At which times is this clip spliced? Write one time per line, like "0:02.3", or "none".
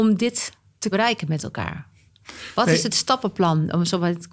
0:00.9